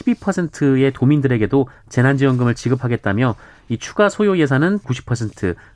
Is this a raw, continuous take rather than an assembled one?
no; 1 cut; at 4.8 s

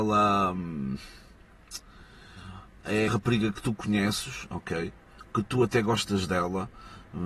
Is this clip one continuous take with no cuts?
no; 1 cut; at 3.1 s

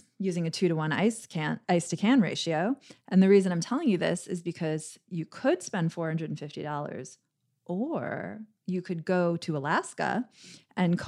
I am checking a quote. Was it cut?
no; 0 cuts

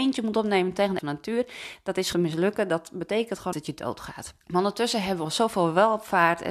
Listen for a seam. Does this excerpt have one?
yes; 5 cuts; at 1.0 s, 2.1 s, 3.5 s, 4.4 s, 5.2 s

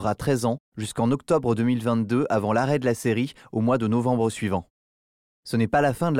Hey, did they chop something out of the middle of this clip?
no; 0 cuts

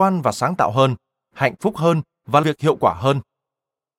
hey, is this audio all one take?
no; 1 cut; at 2.4 s

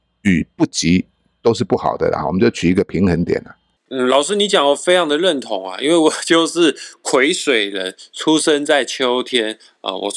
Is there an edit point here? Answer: yes; 1 cut; at 3.8 s

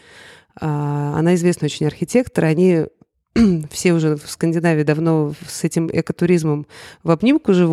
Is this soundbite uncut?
yes; 0 cuts

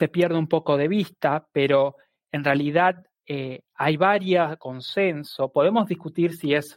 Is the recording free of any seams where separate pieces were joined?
yes; 0 cuts

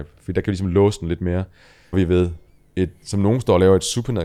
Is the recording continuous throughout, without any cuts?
no; 1 cut; at 1.9 s

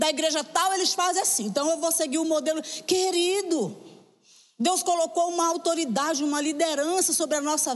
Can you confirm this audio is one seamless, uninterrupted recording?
yes; 0 cuts

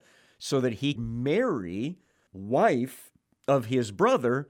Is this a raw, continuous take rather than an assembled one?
no; 2 cuts; at 1.0 s, 2.3 s

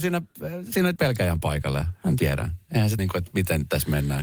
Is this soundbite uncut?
no; 3 cuts; at 1.0 s, 2.2 s, 3.0 s

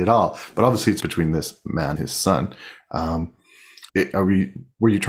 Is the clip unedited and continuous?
no; 3 cuts; at 1.0 s, 2.0 s, 3.9 s

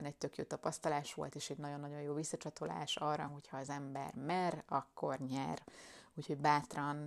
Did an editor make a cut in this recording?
no; 0 cuts

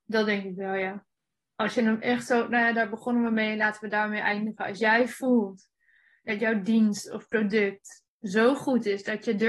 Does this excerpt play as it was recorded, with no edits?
yes; 0 cuts

